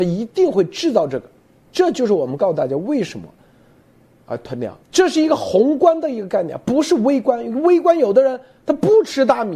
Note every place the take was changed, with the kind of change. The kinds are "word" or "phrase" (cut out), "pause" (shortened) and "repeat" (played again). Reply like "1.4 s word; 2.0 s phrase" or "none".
4.8 s pause